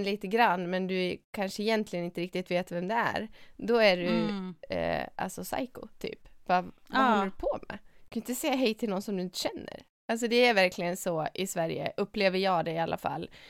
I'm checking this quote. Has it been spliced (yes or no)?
no